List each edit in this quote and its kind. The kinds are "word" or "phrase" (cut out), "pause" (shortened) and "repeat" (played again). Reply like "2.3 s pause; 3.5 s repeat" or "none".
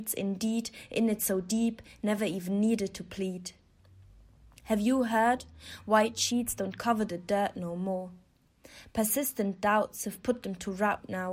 none